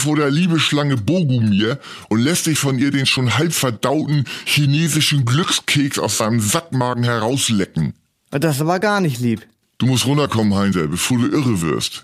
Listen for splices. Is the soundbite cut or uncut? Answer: uncut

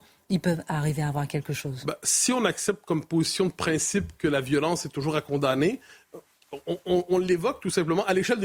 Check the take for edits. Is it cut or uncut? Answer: uncut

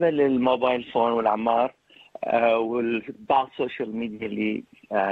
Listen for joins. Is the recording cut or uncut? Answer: uncut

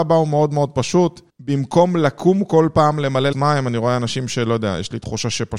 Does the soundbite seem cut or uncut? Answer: cut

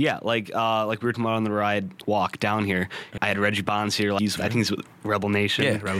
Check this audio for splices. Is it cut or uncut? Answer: cut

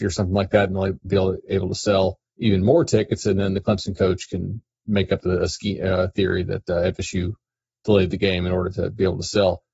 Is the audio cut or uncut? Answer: cut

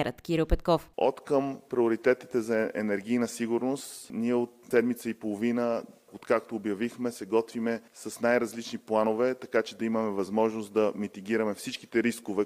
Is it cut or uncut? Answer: cut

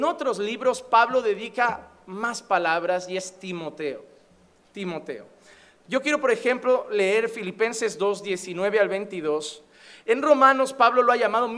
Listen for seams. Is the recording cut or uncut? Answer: uncut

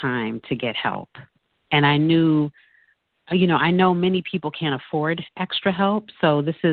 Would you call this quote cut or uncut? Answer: uncut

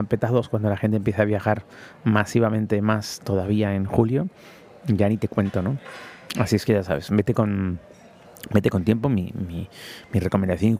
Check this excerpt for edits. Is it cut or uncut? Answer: uncut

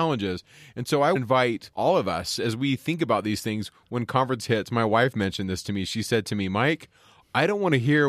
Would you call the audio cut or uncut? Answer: cut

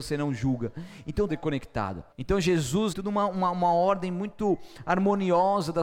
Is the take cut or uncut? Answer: cut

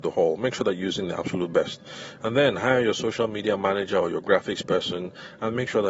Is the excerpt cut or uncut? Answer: uncut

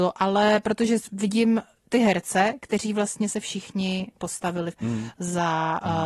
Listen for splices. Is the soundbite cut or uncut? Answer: cut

